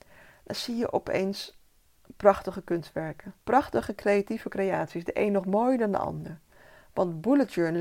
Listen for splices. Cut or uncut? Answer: cut